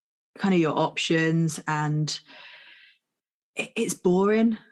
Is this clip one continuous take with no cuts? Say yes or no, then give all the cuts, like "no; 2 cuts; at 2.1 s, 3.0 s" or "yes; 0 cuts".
yes; 0 cuts